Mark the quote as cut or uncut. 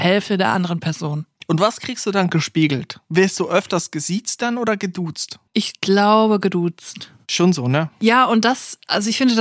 cut